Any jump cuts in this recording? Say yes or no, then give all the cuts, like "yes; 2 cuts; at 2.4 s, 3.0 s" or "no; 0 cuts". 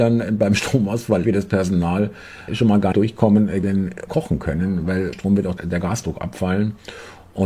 yes; 7 cuts; at 1.2 s, 2.5 s, 2.9 s, 3.6 s, 4.1 s, 5.1 s, 5.6 s